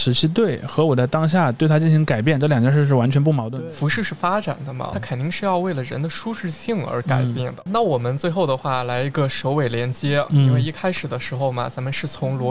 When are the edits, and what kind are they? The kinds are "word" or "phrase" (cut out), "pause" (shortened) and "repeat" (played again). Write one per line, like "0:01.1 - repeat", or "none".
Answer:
0:04.9 - word
0:07.7 - word